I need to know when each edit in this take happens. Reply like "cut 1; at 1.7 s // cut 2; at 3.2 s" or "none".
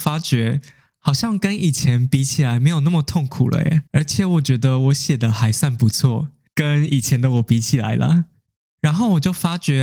cut 1; at 3.9 s